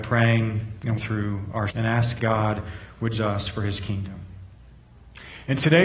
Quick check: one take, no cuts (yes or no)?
no